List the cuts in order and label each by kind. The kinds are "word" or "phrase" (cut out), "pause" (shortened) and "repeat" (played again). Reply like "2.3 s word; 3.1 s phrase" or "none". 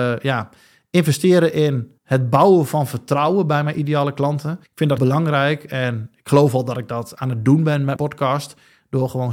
2.0 s pause; 4.6 s pause; 5.0 s word; 8.0 s word